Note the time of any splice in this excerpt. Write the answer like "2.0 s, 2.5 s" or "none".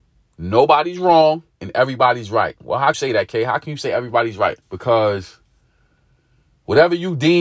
1.5 s, 2.9 s, 4.6 s